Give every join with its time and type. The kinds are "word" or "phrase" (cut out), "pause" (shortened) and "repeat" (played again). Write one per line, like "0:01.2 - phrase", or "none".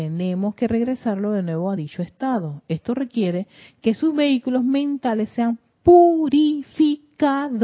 none